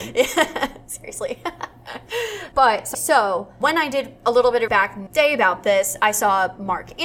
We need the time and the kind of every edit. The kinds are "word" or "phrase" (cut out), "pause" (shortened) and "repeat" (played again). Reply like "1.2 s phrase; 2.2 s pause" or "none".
2.5 s word; 2.9 s word; 3.6 s word; 4.7 s word; 5.1 s word